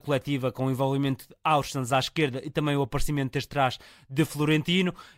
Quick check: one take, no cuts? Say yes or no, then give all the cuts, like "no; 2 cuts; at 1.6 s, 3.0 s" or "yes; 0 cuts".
yes; 0 cuts